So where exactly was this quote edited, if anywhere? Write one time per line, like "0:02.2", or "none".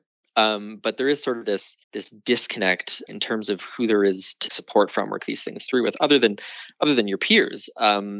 0:01.8
0:03.1
0:04.5
0:05.2